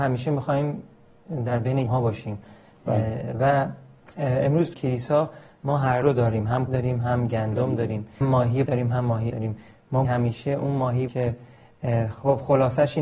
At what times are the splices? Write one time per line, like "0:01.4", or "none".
0:01.9
0:04.7
0:06.0
0:06.7
0:08.2
0:08.7
0:09.3
0:10.0
0:11.1